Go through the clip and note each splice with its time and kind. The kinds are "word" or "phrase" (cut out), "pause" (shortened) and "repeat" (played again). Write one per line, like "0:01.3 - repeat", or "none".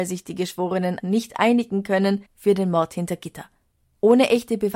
0:01.0 - word